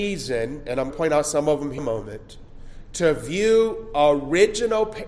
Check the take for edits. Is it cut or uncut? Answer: cut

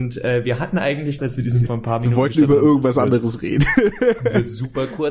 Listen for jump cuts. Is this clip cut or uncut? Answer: cut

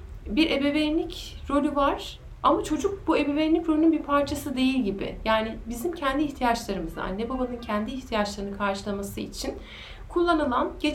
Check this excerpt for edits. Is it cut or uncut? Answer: uncut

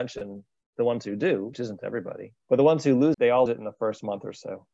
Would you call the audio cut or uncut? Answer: cut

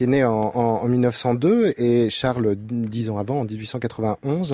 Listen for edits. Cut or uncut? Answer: uncut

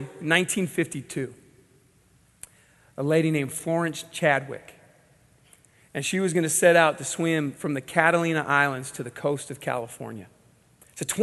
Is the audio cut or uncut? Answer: uncut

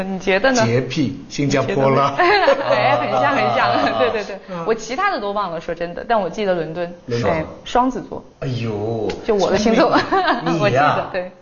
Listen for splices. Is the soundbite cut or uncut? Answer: cut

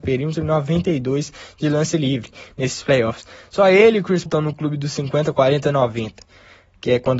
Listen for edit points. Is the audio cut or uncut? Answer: cut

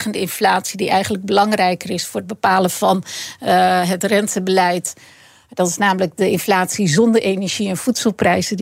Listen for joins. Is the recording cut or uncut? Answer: uncut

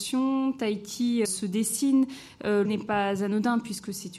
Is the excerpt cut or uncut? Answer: cut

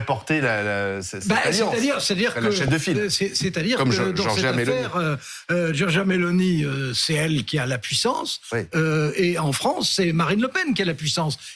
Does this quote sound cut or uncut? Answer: uncut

